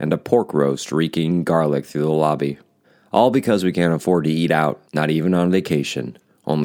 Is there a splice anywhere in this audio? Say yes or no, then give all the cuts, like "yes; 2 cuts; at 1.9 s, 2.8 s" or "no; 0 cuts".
yes; 2 cuts; at 2.8 s, 4.8 s